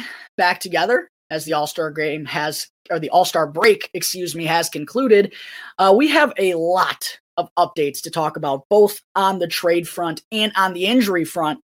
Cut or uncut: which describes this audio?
uncut